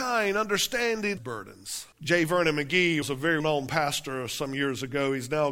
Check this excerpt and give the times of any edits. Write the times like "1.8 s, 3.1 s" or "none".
1.2 s, 1.9 s, 3.0 s, 3.4 s